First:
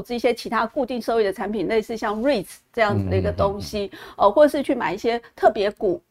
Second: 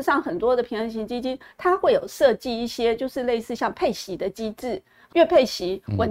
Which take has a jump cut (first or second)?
second